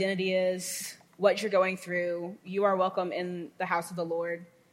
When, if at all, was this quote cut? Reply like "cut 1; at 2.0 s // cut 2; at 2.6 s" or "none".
cut 1; at 1.1 s